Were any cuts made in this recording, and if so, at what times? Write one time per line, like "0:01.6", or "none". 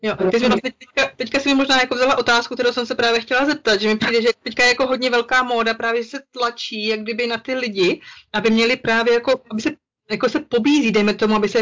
none